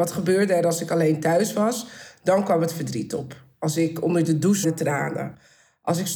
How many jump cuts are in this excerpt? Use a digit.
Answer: 1